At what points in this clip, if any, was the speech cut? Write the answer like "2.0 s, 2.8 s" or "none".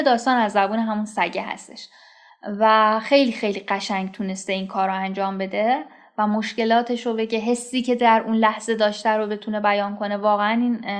none